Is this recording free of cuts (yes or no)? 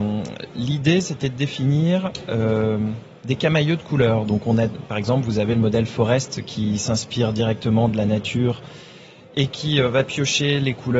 yes